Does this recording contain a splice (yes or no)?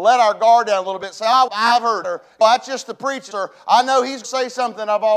yes